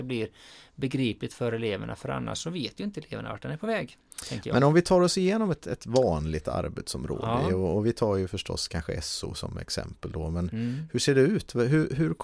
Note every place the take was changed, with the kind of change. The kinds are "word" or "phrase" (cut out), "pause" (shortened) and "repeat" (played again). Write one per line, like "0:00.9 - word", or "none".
none